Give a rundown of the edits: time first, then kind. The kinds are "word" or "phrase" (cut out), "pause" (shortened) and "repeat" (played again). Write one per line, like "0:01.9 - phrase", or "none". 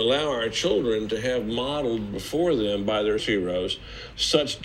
0:03.2 - word